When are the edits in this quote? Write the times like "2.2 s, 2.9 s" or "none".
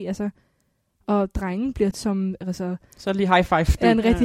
1.9 s